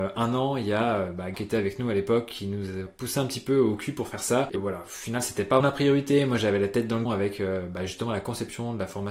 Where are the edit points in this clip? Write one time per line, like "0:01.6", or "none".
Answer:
0:01.3
0:02.9
0:04.5
0:05.6
0:07.0